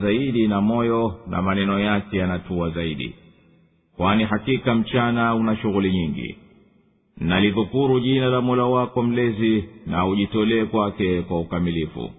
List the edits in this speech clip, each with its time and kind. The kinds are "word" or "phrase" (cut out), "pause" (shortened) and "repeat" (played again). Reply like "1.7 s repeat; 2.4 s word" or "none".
none